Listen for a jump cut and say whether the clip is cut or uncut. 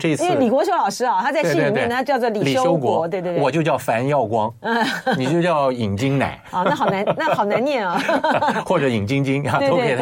uncut